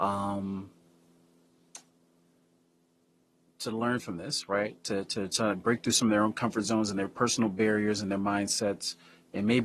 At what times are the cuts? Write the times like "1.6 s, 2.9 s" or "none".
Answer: none